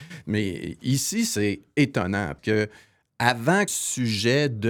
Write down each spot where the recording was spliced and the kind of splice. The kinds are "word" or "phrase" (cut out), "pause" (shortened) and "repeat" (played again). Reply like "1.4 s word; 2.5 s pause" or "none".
2.4 s word; 3.7 s word